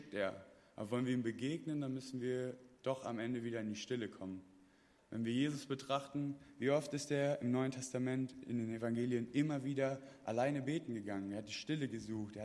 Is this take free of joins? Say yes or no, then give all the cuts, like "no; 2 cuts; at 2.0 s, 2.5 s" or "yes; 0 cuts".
yes; 0 cuts